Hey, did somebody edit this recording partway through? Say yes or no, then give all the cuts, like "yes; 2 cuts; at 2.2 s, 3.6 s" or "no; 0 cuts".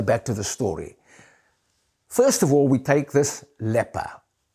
no; 0 cuts